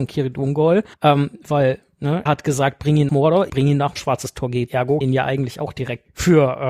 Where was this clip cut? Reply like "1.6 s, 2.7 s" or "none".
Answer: 0.9 s, 2.3 s, 3.1 s, 3.5 s, 4.0 s, 4.7 s, 5.0 s